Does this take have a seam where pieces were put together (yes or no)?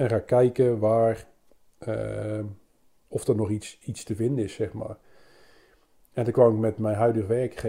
no